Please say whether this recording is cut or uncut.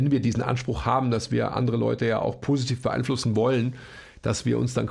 uncut